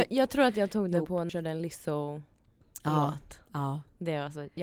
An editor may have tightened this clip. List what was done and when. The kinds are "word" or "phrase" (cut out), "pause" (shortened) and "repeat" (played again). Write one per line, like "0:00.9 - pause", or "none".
0:01.3 - word